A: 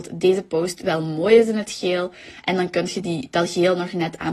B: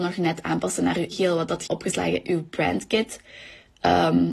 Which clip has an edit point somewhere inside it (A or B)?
B